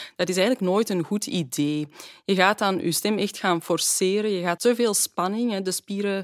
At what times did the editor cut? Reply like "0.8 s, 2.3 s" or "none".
4.6 s